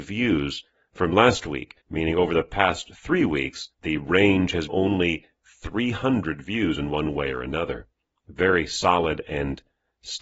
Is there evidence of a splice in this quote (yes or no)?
yes